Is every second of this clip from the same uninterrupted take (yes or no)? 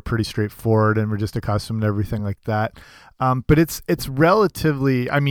yes